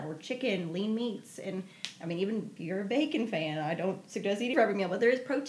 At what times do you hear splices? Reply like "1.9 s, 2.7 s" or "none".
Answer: 2.6 s, 4.5 s